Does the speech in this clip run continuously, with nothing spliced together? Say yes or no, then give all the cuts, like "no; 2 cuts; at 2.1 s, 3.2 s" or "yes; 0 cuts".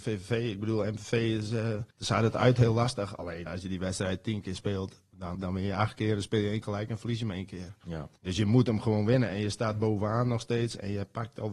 no; 5 cuts; at 1.9 s, 3.5 s, 5.3 s, 6.6 s, 8.2 s